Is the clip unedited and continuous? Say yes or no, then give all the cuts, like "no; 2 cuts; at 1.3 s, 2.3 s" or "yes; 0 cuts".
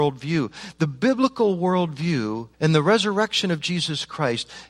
no; 1 cut; at 2.5 s